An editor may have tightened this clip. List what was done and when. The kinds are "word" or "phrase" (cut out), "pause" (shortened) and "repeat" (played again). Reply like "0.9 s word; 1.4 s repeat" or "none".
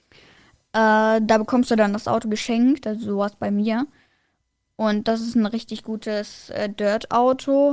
none